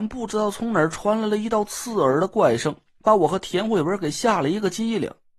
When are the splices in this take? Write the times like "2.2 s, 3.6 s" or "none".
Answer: none